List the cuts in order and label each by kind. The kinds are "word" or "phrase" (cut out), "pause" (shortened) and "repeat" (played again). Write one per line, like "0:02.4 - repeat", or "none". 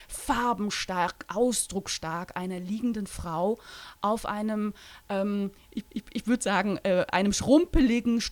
0:05.9 - repeat

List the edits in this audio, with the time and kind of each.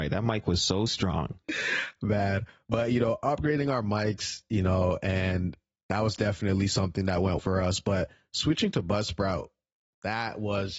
0:01.4 - pause
0:07.4 - word

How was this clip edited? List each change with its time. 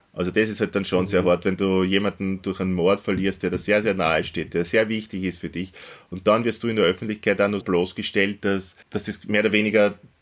0:07.6 - word
0:08.8 - pause

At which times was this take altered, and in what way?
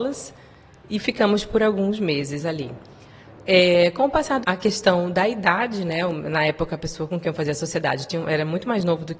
0:04.4 - phrase

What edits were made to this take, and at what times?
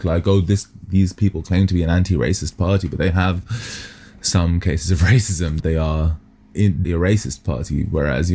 0:05.6 - word
0:06.8 - word

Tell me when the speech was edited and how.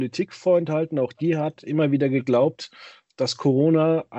none

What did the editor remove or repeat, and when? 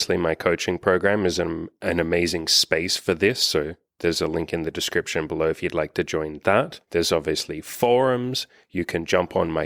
0:06.8 - pause

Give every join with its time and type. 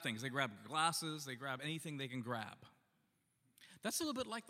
none

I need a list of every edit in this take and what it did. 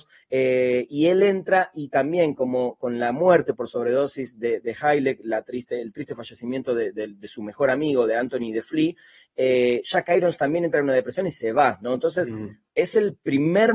none

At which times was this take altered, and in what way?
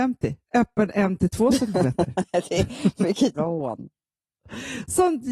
0:03.4 - word

